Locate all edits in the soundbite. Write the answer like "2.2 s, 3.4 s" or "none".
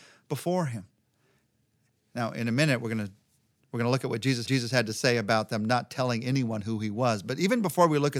4.5 s